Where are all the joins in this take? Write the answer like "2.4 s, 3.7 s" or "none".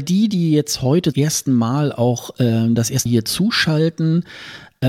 1.1 s, 3.1 s